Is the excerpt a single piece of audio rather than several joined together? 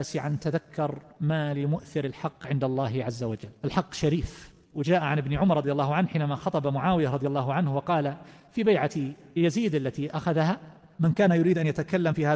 yes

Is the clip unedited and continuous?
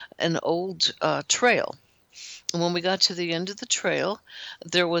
yes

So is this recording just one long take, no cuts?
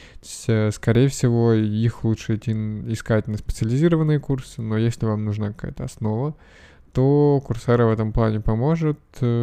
yes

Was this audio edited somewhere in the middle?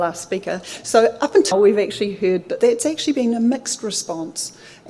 yes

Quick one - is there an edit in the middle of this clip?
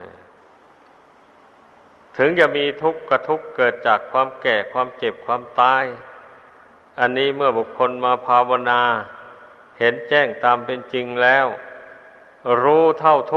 no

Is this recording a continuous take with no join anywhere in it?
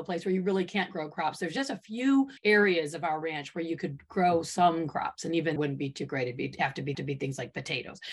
no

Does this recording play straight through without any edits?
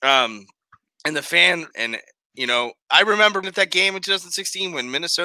no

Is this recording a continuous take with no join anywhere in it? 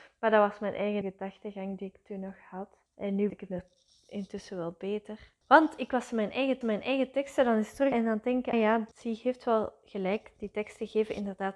no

